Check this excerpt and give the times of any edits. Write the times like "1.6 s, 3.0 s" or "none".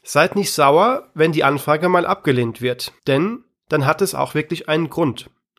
3.0 s

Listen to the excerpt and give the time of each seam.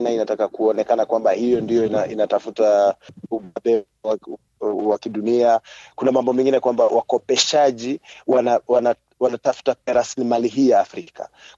none

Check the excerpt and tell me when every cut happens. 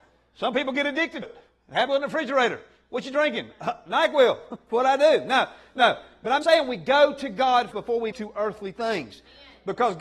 1.2 s, 1.9 s, 6.4 s, 7.7 s, 8.1 s

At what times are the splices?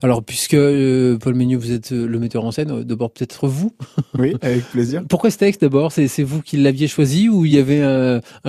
none

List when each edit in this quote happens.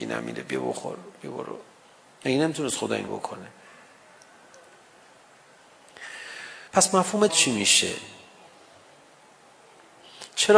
1.8 s, 3.1 s, 6.7 s, 7.3 s

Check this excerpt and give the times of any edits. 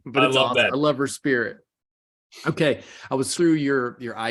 3.4 s

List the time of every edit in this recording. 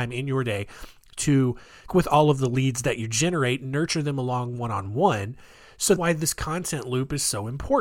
1.9 s, 6.0 s

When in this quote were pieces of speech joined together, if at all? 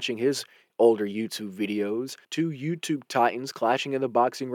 2.2 s

